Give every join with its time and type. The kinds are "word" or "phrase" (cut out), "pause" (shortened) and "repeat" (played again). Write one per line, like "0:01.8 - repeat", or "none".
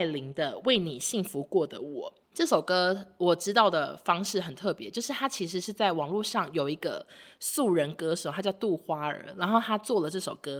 0:02.2 - pause